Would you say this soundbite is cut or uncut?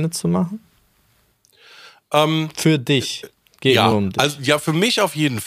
uncut